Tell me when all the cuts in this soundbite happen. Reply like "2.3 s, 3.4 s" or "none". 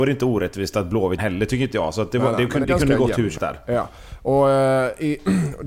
1.2 s, 2.6 s, 3.4 s